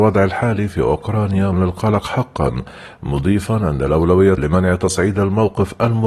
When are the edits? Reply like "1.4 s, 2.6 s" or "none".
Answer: 1.5 s, 4.4 s